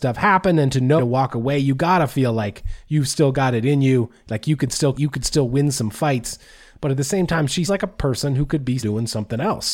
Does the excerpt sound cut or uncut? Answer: cut